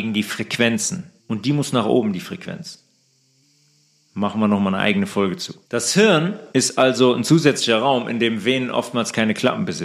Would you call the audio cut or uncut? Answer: cut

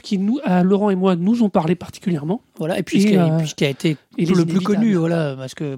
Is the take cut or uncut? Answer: uncut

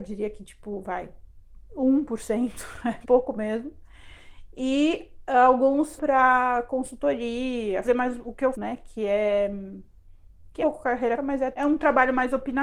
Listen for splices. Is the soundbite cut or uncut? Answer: cut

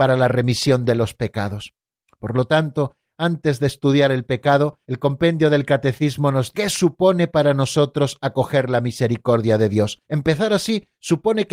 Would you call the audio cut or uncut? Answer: cut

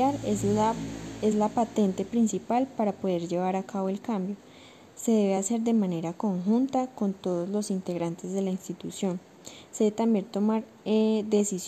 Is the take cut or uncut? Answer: uncut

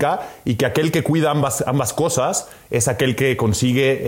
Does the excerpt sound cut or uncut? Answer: uncut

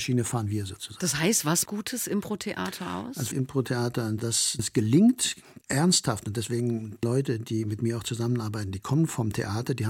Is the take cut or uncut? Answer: cut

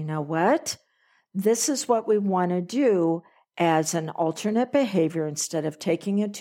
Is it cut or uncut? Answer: uncut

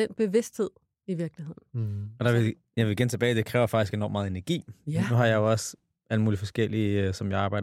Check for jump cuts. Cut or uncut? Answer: uncut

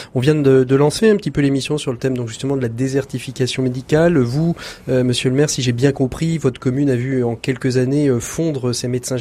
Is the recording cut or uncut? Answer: uncut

